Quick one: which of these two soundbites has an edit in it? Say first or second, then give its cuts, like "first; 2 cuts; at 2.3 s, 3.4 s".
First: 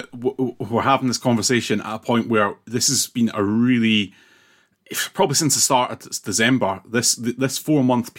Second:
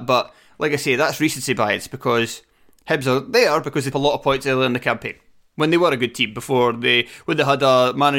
second; 1 cut; at 3.9 s